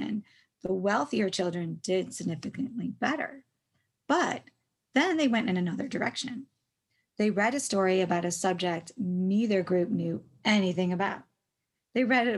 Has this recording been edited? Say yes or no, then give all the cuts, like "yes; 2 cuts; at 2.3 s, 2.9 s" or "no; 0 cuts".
no; 0 cuts